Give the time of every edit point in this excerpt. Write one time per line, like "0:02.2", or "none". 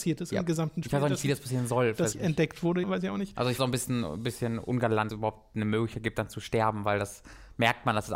0:02.1
0:02.8
0:03.6
0:05.1

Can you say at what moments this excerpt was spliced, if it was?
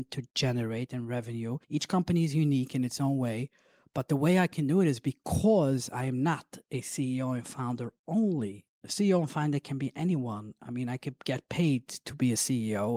0:01.6

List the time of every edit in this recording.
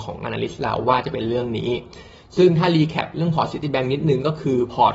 none

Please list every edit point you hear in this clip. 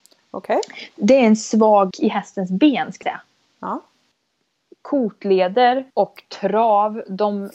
0:01.9
0:03.0
0:05.9

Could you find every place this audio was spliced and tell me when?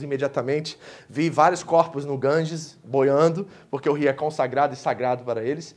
none

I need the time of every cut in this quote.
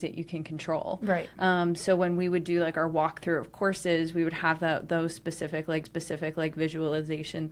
0:05.8

